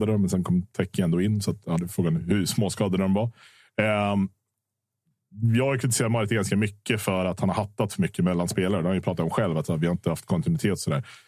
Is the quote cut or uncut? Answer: uncut